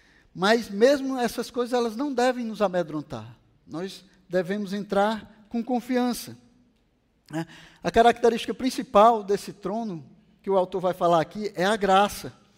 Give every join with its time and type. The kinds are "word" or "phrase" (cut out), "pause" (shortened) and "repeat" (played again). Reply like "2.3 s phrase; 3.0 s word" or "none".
none